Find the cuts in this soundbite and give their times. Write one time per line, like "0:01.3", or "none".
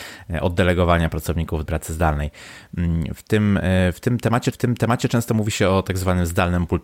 0:01.7
0:04.5

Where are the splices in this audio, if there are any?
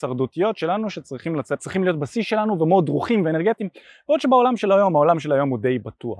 0:01.6

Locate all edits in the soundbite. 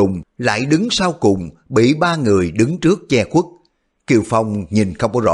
none

